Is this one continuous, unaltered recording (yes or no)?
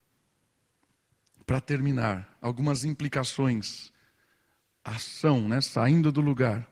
yes